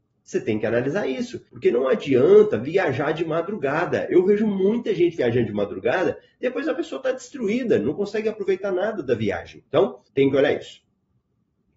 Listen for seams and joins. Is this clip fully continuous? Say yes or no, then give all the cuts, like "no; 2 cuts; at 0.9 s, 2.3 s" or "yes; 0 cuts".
no; 2 cuts; at 1.5 s, 10.0 s